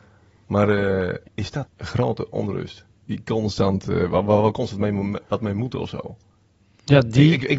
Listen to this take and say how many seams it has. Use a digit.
3